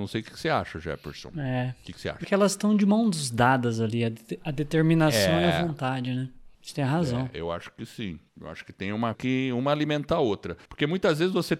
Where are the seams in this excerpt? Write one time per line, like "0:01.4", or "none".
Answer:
0:02.2
0:06.5
0:08.3
0:09.1
0:10.7